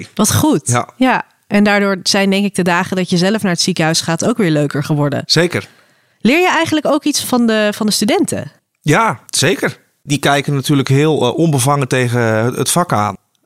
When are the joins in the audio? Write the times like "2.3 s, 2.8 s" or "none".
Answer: 7.2 s